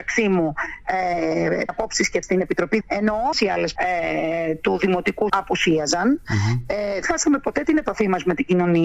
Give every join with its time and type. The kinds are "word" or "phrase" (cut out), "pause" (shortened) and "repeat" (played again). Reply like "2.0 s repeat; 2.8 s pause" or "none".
1.7 s word; 2.2 s word; 2.8 s word; 3.3 s word; 3.8 s word; 5.3 s word; 7.0 s word